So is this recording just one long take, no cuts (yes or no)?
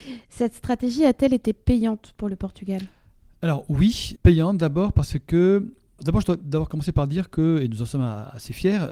no